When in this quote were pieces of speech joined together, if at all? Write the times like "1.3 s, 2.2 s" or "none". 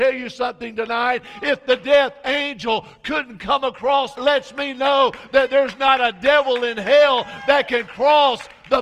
4.2 s